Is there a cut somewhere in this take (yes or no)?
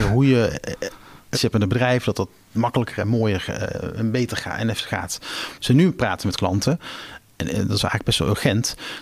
yes